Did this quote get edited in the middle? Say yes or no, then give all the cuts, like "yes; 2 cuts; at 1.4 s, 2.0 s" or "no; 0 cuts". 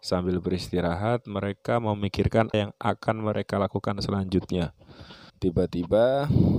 yes; 2 cuts; at 2.5 s, 5.3 s